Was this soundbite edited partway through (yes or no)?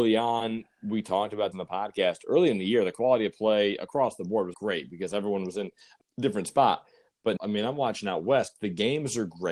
yes